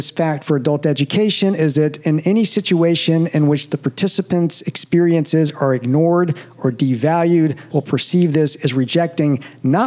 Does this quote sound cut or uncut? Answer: cut